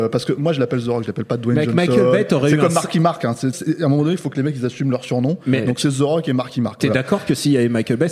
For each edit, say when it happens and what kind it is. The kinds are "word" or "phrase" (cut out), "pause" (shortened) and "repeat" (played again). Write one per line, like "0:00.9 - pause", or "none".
0:03.5 - word